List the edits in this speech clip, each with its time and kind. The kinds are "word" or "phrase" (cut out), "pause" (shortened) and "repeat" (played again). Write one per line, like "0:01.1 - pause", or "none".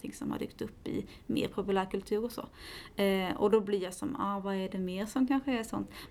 none

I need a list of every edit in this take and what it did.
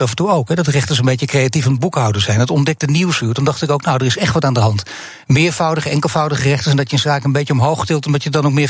none

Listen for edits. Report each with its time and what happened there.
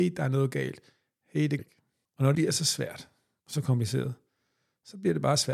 0:01.6 - word
0:02.3 - word

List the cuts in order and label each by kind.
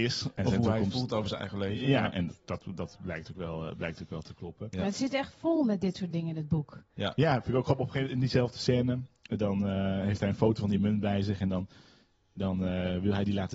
none

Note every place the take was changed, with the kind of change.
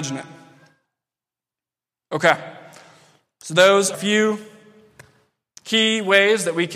0:03.9 - word

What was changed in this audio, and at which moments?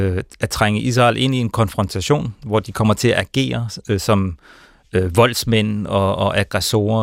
none

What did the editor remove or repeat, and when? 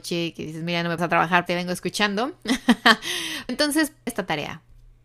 0:01.0 - word
0:01.5 - phrase
0:03.5 - word
0:04.1 - word

